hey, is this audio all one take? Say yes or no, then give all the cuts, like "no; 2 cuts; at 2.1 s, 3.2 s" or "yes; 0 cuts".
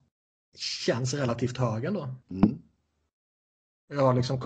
no; 1 cut; at 2.2 s